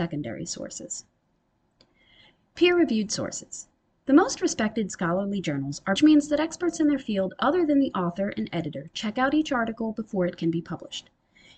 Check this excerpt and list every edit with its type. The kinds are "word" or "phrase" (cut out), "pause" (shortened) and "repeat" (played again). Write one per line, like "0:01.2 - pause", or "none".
0:05.9 - phrase